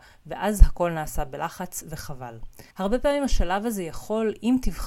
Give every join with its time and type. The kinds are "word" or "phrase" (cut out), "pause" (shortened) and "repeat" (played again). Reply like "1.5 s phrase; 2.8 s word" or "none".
2.7 s pause